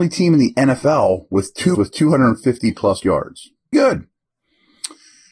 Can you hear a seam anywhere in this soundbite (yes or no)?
yes